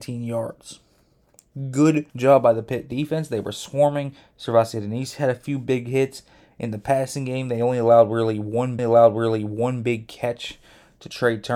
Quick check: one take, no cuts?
no; 2 cuts; at 2.1 s, 8.8 s

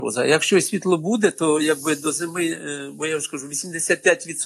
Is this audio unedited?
yes; 0 cuts

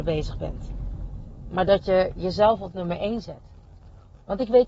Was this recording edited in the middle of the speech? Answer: no; 0 cuts

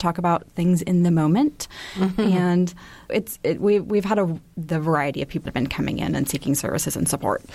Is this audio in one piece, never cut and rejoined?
no; 2 cuts; at 3.1 s, 5.4 s

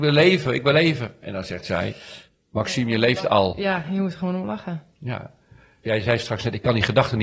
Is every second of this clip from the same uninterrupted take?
yes; 0 cuts

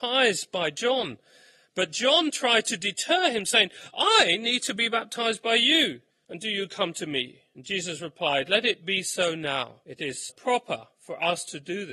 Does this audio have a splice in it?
yes; 1 cut; at 10.3 s

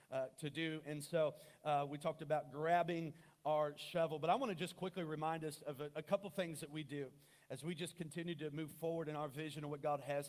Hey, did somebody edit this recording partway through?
no; 0 cuts

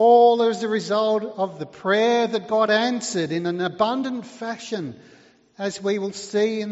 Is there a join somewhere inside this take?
no; 0 cuts

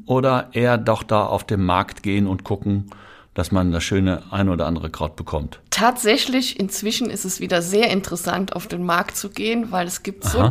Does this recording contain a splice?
no; 0 cuts

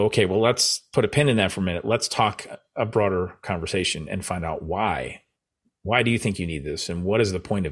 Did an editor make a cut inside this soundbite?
no; 0 cuts

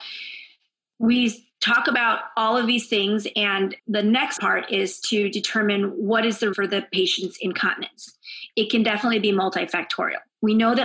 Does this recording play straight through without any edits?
no; 3 cuts; at 3.8 s, 4.4 s, 6.5 s

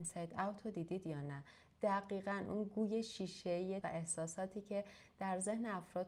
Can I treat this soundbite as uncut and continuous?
no; 1 cut; at 3.8 s

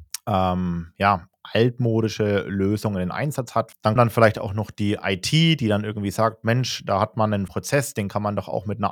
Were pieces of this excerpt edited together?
yes; 2 cuts; at 4.0 s, 7.5 s

